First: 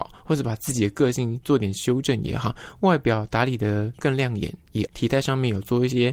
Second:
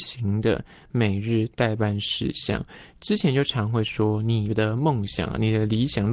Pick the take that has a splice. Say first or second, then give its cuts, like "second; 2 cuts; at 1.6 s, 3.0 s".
first; 1 cut; at 4.9 s